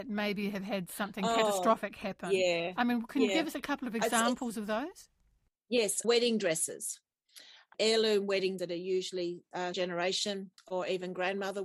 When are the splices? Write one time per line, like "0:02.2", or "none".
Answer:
0:06.0
0:08.6
0:09.7